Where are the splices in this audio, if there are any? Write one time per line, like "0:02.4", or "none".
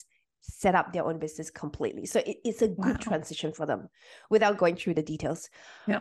none